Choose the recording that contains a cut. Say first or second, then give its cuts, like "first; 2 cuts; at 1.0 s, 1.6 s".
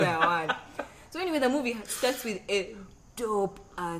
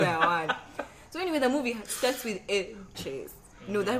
second; 1 cut; at 2.9 s